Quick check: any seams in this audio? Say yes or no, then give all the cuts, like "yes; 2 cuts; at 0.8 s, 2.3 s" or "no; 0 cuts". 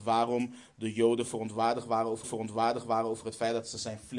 yes; 1 cut; at 2.2 s